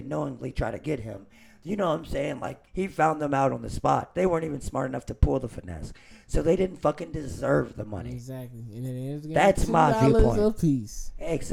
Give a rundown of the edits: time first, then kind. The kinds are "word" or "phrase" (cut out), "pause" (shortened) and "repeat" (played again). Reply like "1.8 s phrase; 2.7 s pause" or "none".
2.7 s pause

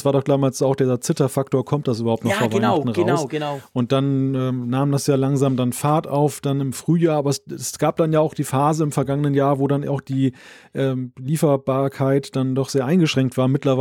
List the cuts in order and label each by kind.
none

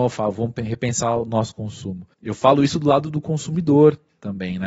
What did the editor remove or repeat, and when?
2.1 s pause

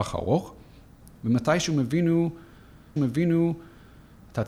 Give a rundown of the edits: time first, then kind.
3.0 s repeat

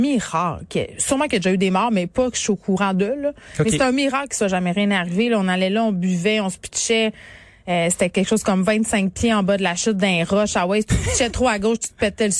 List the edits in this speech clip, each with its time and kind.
none

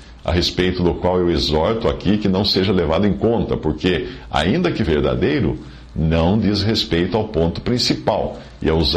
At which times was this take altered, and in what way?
4.9 s word

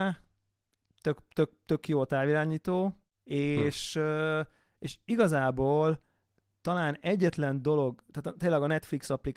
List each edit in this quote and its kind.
none

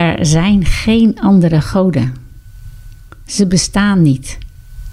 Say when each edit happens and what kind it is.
none

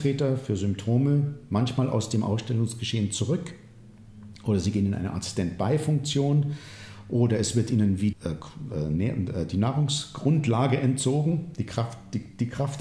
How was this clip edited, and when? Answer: 8.1 s word

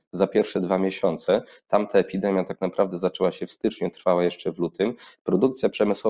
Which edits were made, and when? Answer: none

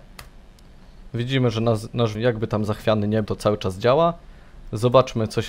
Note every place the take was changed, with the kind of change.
2.1 s phrase; 3.2 s word

